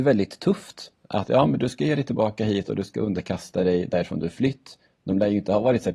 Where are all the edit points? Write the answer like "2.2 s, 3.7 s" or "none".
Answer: none